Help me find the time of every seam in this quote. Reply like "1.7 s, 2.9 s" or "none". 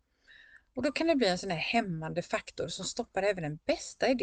none